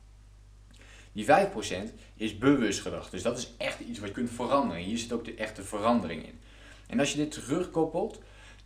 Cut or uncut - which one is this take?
cut